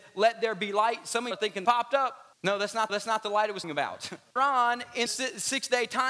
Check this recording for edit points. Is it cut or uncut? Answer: cut